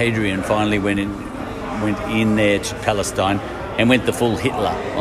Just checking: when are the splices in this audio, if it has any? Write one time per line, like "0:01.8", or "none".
none